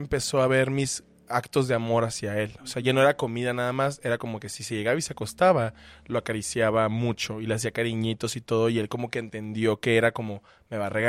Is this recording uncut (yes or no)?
yes